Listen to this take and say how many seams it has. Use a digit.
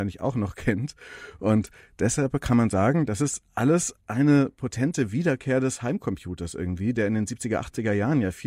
0